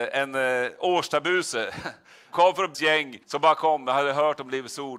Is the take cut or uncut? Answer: cut